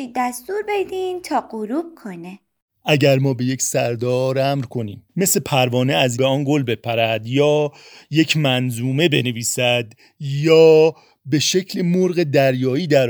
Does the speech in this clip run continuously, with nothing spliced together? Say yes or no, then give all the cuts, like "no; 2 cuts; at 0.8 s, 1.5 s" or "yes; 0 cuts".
no; 2 cuts; at 5.1 s, 6.1 s